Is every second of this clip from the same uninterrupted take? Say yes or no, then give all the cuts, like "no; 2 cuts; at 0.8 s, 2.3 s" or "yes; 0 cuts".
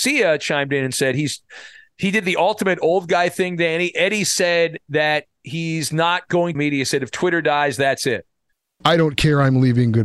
no; 1 cut; at 6.5 s